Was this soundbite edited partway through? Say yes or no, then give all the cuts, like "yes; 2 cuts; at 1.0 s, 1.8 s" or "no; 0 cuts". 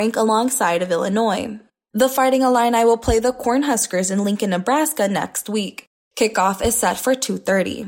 no; 0 cuts